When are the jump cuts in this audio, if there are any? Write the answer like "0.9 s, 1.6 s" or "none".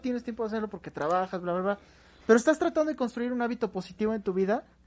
none